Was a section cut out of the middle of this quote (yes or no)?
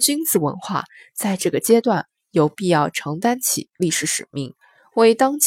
no